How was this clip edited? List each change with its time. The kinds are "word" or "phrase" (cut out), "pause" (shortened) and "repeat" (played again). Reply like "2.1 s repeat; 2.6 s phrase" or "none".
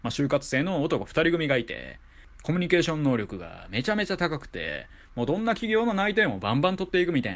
2.4 s phrase